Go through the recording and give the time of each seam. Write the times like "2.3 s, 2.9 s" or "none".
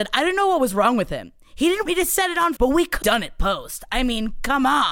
1.9 s, 2.6 s, 3.0 s